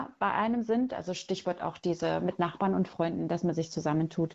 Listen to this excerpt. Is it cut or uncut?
uncut